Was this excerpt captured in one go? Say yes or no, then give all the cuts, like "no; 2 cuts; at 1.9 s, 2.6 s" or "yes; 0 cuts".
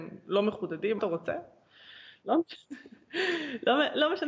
no; 1 cut; at 1.0 s